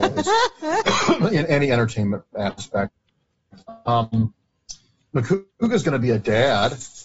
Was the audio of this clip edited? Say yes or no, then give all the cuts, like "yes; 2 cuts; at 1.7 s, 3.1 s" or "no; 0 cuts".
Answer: no; 0 cuts